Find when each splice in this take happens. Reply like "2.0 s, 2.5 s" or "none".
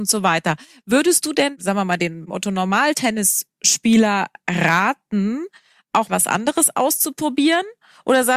6.1 s